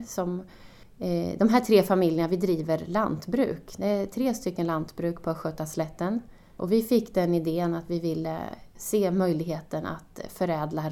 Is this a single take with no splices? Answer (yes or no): yes